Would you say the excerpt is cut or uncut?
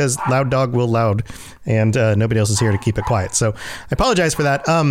uncut